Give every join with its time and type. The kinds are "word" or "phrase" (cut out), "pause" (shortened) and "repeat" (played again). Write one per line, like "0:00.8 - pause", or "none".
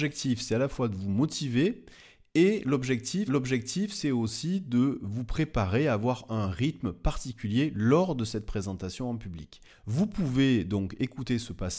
0:03.3 - repeat
0:09.7 - pause